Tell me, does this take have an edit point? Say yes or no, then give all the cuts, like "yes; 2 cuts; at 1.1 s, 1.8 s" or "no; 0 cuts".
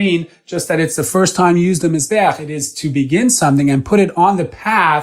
no; 0 cuts